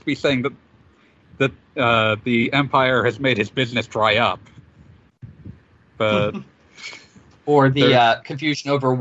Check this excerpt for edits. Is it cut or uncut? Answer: uncut